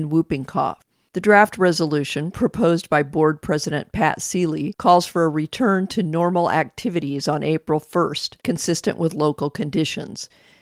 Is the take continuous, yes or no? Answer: no